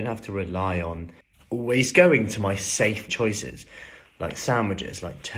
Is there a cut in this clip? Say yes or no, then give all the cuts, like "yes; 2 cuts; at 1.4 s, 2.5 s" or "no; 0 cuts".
yes; 2 cuts; at 1.2 s, 3.1 s